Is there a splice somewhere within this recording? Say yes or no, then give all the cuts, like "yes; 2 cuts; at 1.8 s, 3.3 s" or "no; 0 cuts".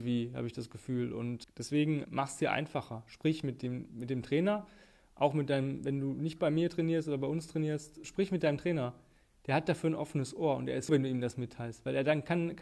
yes; 4 cuts; at 1.4 s, 2.0 s, 8.0 s, 10.9 s